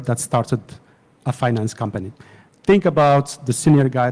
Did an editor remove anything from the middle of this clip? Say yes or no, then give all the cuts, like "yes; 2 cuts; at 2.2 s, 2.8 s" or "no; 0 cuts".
no; 0 cuts